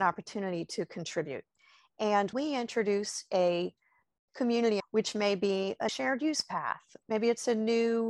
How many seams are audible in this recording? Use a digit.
4